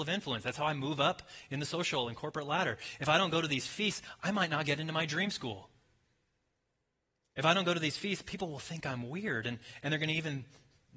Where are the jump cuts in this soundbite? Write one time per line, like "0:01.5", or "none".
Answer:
none